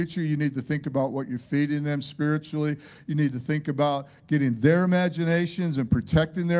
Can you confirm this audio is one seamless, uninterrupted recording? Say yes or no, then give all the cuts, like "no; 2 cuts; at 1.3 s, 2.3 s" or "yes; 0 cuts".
yes; 0 cuts